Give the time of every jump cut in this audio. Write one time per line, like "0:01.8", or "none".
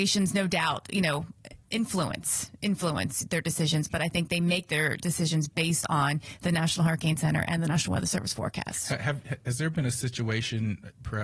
none